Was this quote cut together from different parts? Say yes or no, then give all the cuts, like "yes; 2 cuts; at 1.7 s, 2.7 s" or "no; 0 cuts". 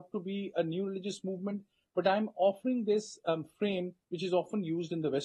no; 0 cuts